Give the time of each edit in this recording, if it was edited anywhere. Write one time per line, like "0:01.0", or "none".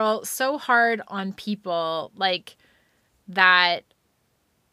none